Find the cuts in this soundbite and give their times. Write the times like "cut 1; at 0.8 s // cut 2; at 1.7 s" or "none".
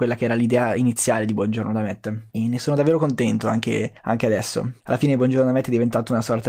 cut 1; at 2.3 s // cut 2; at 4.0 s // cut 3; at 4.8 s